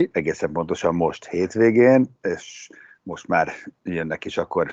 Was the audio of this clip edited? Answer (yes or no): no